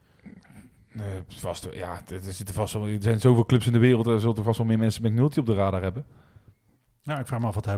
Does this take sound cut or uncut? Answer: uncut